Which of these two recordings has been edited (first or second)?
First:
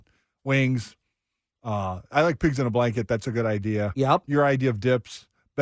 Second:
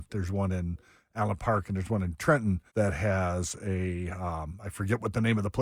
second